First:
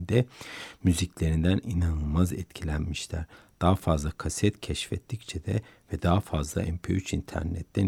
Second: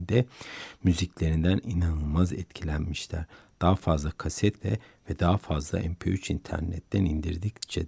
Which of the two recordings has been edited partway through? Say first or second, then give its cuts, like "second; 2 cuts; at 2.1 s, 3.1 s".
second; 1 cut; at 4.6 s